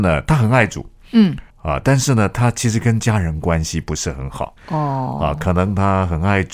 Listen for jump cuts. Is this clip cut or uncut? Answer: cut